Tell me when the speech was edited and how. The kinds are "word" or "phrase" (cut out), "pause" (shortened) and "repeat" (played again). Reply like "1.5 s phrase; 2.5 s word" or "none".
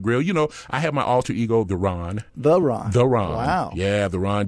2.3 s pause